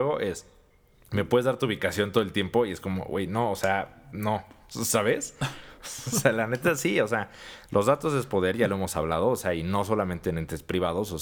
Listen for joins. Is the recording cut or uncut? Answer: uncut